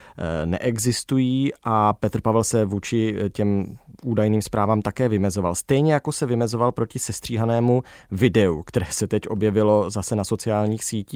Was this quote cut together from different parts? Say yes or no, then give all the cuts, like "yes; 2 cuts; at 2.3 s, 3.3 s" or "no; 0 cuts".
no; 0 cuts